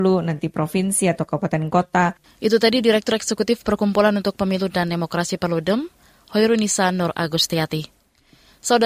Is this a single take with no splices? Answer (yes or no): yes